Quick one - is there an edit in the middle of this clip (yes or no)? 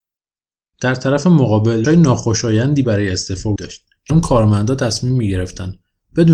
yes